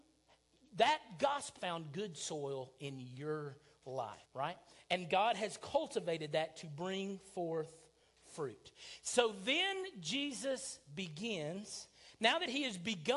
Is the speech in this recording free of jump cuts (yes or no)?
no